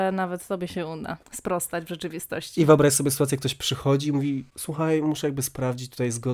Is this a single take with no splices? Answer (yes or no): no